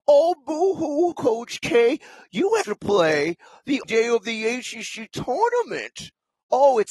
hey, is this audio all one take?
no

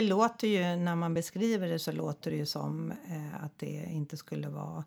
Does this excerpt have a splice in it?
no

